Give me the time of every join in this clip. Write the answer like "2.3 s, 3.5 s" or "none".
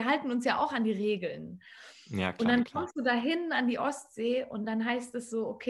none